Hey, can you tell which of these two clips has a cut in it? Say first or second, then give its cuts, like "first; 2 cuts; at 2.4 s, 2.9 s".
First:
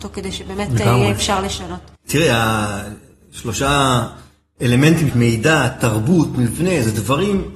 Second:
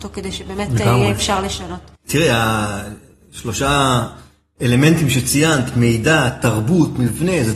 first; 1 cut; at 5.1 s